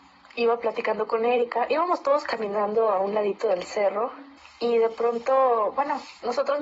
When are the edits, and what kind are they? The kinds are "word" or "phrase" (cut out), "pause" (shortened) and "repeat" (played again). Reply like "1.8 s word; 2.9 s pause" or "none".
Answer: 4.4 s pause